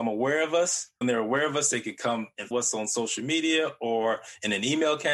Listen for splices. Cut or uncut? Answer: cut